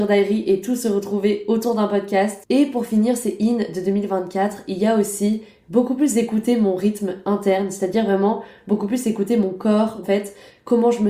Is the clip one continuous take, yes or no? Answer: no